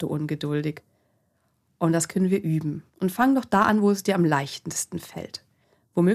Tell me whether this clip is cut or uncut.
cut